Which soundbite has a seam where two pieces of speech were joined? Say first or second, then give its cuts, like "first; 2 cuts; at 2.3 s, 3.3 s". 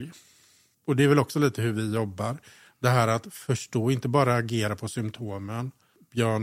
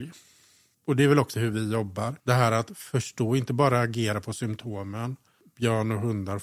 second; 2 cuts; at 1.3 s, 2.2 s